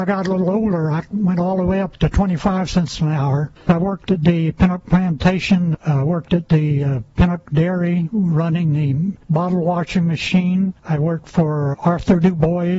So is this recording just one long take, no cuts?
no; 1 cut; at 11.7 s

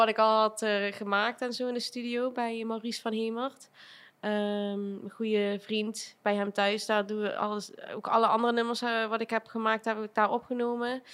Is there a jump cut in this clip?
no; 0 cuts

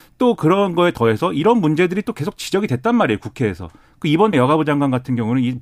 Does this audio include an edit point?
yes; 1 cut; at 4.3 s

